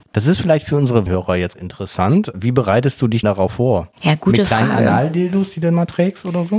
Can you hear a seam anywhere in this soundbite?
yes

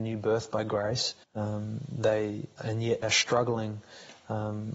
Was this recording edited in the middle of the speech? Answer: yes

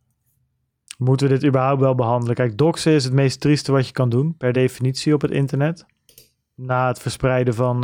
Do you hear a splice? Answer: no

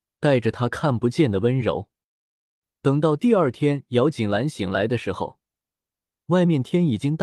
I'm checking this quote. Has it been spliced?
no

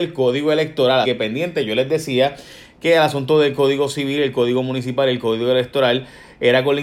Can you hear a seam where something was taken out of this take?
yes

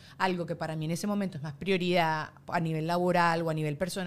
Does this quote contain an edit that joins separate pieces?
no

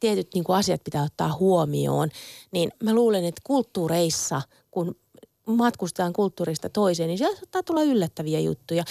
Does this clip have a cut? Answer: no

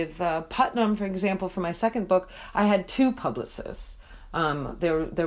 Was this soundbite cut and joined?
no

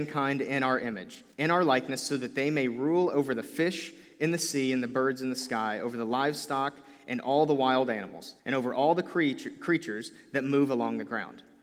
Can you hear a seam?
yes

